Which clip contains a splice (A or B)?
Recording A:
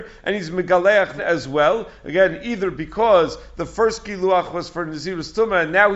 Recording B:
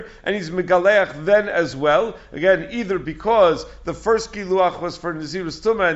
A